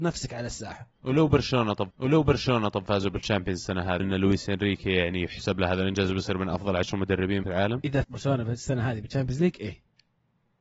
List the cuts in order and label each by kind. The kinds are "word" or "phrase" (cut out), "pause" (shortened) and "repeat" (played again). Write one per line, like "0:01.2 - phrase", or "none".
0:01.9 - repeat
0:04.0 - word
0:07.4 - word
0:08.0 - word